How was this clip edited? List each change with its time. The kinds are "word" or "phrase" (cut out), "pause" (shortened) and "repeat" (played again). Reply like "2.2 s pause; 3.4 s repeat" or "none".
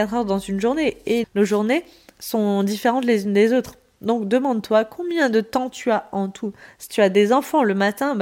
1.2 s word